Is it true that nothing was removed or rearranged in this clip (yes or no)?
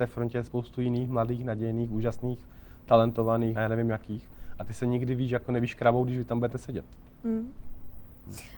no